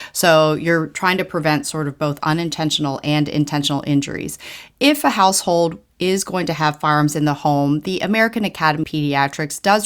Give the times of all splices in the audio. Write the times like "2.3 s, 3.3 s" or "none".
8.8 s